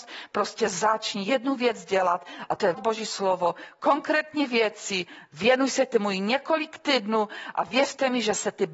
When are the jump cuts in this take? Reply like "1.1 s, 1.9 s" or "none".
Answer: 2.7 s